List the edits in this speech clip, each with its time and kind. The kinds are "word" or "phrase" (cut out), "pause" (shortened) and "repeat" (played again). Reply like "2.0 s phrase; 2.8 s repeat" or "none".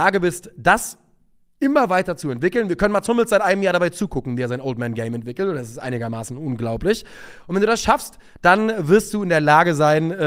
none